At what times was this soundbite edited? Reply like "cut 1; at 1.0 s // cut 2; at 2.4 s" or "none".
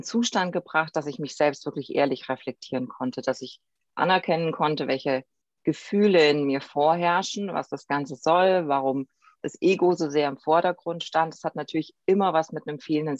none